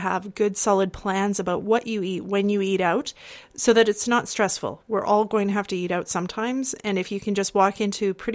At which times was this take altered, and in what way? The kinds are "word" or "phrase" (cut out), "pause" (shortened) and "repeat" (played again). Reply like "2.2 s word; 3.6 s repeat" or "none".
none